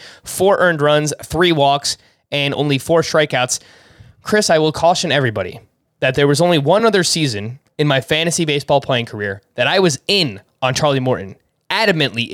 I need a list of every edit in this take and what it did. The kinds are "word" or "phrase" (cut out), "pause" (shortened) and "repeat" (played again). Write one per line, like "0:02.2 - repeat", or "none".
none

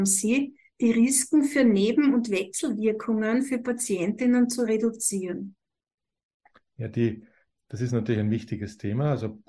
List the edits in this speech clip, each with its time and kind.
none

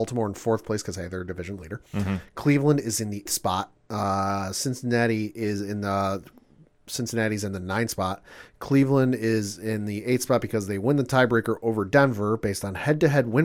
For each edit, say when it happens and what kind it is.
0:03.3 - word

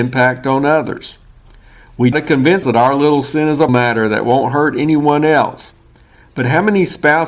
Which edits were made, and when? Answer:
0:02.1 - word
0:02.6 - word
0:03.7 - word

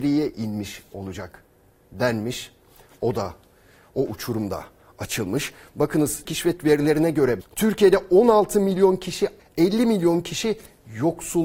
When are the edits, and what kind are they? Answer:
0:06.3 - word
0:06.6 - word
0:07.4 - word
0:09.4 - word

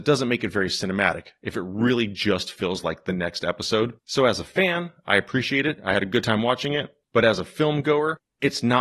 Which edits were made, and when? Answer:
0:04.0 - pause

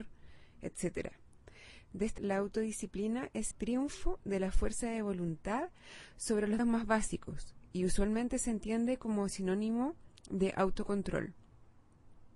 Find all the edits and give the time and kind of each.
0:02.2 - word
0:03.5 - word
0:06.6 - word

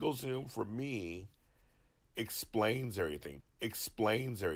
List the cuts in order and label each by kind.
0:03.4 - repeat

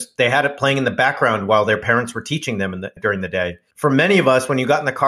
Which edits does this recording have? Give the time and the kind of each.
0:03.0 - word
0:03.7 - pause

